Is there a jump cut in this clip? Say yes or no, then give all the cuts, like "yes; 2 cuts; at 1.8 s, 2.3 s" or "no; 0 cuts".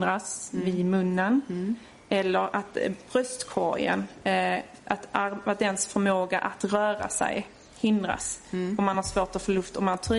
no; 0 cuts